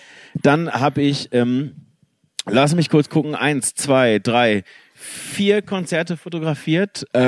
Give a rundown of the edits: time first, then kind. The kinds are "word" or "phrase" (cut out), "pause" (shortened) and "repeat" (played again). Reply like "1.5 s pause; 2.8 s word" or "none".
none